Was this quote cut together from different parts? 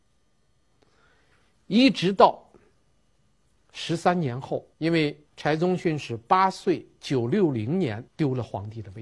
yes; 3 cuts; at 4.7 s, 5.3 s, 8.1 s

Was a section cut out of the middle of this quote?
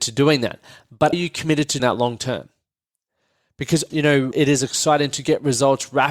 yes; 4 cuts; at 1.1 s, 1.8 s, 3.9 s, 4.3 s

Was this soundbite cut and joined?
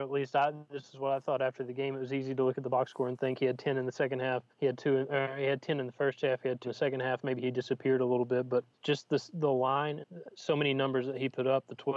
yes; 4 cuts; at 4.5 s, 6.6 s, 8.7 s, 10.0 s

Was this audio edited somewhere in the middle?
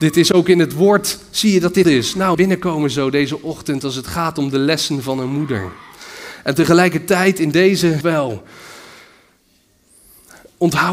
yes; 3 cuts; at 1.8 s, 2.3 s, 8.0 s

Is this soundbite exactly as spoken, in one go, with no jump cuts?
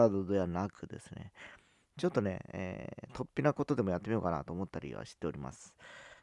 yes; 0 cuts

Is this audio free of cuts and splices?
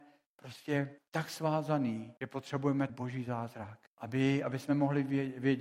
no; 4 cuts; at 1.0 s, 2.2 s, 2.9 s, 3.9 s

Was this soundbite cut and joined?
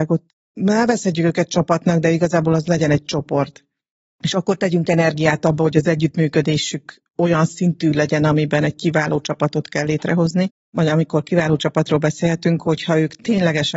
no; 0 cuts

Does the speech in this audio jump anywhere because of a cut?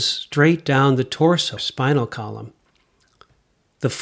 yes; 1 cut; at 1.6 s

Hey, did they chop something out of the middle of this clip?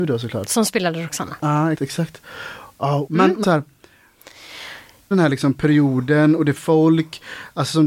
yes; 5 cuts; at 1.7 s, 3.1 s, 3.4 s, 5.1 s, 6.6 s

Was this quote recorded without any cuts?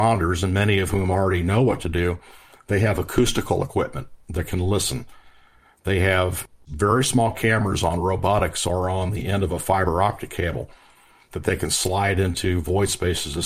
yes; 0 cuts

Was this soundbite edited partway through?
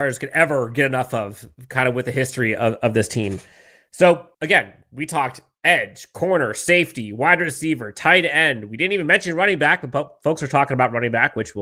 yes; 1 cut; at 4.3 s

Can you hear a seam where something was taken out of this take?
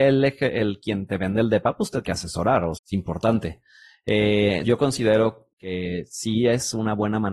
yes; 4 cuts; at 2.0 s, 2.7 s, 4.6 s, 5.5 s

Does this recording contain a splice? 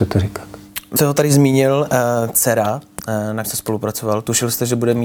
yes; 3 cuts; at 1.0 s, 2.3 s, 3.4 s

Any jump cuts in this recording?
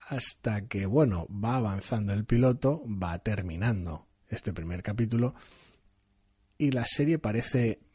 no; 0 cuts

